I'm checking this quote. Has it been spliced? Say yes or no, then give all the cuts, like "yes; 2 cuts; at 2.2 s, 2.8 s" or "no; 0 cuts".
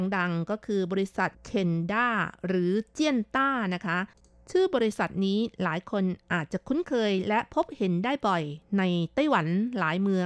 yes; 1 cut; at 1.3 s